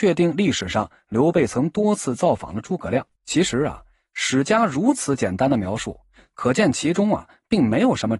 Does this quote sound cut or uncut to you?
cut